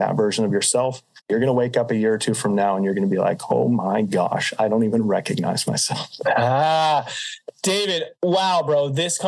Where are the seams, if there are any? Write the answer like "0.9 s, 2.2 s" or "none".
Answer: 1.2 s, 8.1 s